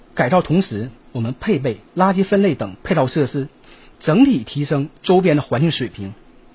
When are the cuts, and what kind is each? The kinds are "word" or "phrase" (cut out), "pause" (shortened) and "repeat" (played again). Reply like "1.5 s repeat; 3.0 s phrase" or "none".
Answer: none